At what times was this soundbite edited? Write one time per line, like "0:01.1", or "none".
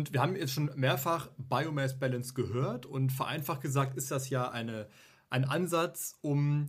none